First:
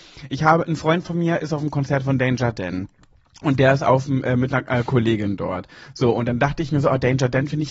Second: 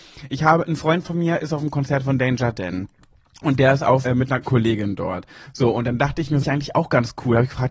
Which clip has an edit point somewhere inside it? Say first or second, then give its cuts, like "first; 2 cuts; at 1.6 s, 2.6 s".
second; 3 cuts; at 4.1 s, 4.4 s, 6.4 s